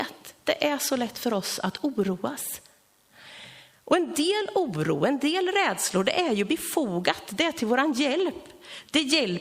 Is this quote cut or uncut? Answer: uncut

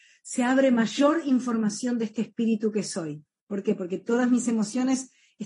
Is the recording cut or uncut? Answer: uncut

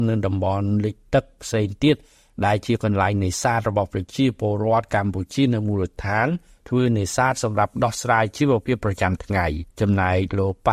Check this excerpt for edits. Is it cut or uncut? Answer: cut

